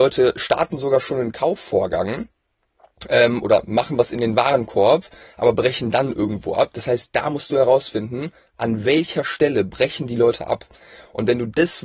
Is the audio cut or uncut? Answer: uncut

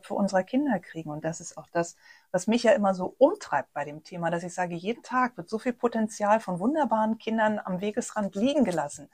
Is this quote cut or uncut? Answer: uncut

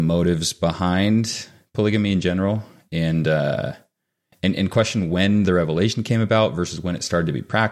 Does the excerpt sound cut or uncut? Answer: uncut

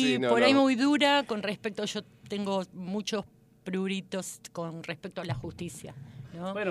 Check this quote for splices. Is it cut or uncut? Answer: uncut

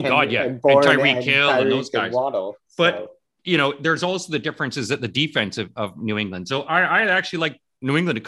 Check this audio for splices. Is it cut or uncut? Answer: uncut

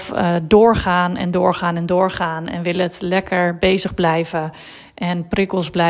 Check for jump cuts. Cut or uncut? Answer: uncut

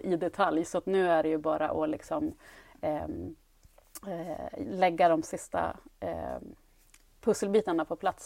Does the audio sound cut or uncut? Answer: uncut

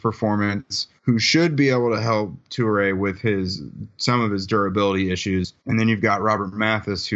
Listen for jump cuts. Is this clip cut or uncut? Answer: cut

